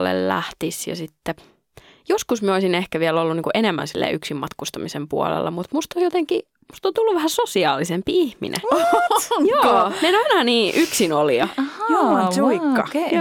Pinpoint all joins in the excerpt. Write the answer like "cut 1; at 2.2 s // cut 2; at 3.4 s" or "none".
none